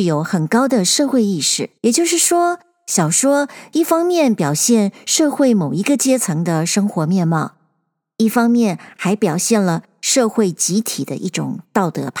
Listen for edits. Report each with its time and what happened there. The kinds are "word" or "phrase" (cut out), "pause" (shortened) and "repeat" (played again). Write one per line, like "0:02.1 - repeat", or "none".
0:01.8 - pause